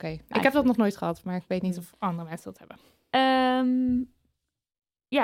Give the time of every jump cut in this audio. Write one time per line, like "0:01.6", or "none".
none